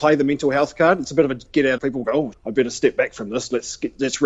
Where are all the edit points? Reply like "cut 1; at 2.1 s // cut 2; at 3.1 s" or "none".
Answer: cut 1; at 1.8 s // cut 2; at 2.3 s